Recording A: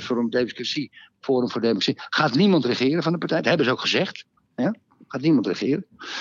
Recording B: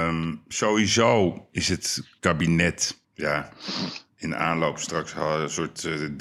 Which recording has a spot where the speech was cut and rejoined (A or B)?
B